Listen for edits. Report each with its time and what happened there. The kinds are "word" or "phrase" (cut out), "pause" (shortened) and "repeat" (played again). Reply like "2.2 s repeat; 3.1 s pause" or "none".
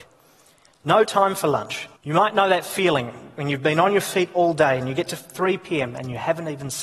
2.0 s pause